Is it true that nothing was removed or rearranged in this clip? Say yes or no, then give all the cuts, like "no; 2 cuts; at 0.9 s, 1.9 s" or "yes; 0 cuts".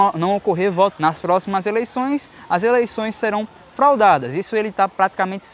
no; 1 cut; at 0.9 s